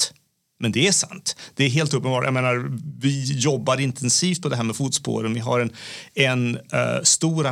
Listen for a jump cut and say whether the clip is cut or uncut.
uncut